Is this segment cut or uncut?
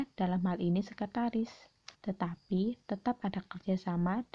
cut